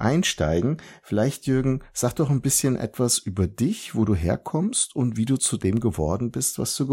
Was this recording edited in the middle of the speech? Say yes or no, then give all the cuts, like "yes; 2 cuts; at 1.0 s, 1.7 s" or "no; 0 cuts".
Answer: no; 0 cuts